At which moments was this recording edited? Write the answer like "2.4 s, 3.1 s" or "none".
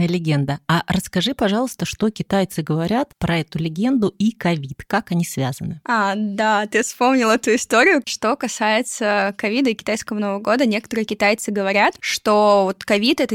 none